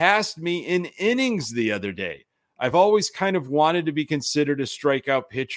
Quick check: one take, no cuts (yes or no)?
yes